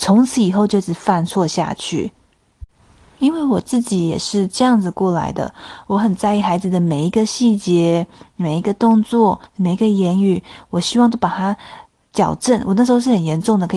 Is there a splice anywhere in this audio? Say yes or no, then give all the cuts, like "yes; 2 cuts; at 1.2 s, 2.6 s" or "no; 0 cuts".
yes; 1 cut; at 9.5 s